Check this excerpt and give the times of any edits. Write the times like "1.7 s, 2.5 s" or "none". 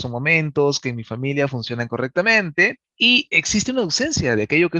3.3 s